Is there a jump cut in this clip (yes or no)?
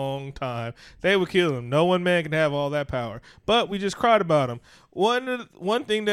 no